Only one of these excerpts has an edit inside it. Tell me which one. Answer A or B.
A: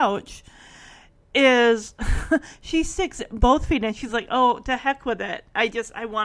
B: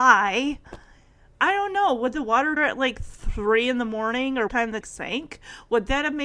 B